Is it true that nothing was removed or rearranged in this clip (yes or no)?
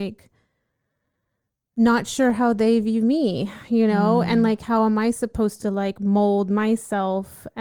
yes